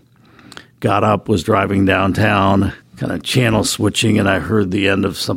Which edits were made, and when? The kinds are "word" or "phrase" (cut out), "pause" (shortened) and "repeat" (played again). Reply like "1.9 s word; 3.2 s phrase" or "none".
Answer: 2.8 s pause